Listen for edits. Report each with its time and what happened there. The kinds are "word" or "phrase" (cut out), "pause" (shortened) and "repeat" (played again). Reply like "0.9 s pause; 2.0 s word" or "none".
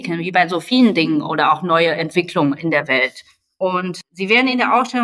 none